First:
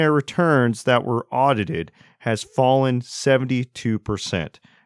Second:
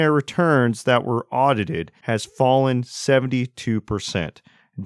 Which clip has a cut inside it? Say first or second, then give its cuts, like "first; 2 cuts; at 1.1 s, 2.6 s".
second; 1 cut; at 2.0 s